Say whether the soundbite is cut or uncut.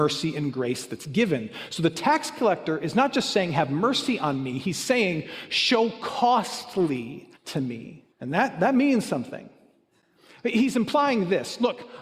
cut